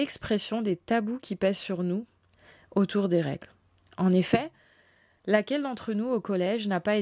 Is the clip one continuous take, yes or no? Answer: yes